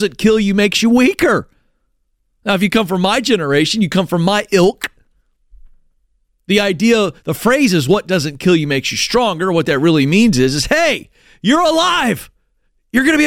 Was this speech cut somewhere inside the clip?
no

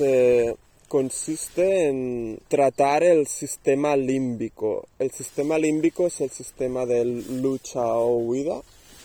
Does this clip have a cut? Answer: yes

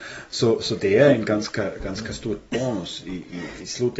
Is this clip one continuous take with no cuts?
yes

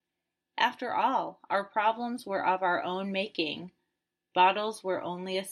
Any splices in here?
no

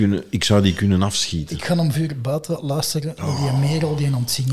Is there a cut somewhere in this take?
yes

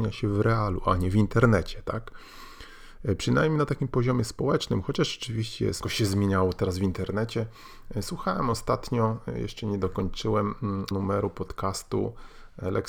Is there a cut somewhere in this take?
yes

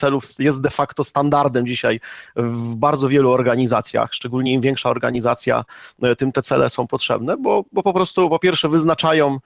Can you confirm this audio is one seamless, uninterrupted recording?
yes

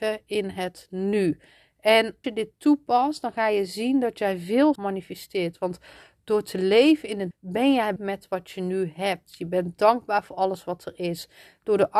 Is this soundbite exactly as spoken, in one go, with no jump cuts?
no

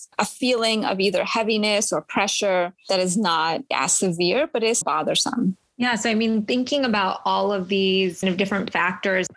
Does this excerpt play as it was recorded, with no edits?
no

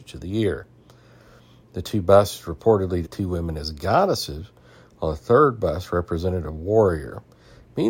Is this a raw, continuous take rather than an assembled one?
no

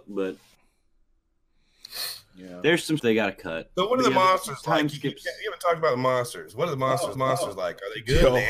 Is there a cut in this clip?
yes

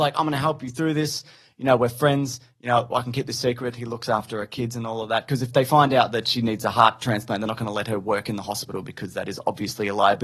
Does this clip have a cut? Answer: no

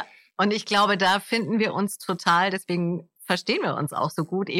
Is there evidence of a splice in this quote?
no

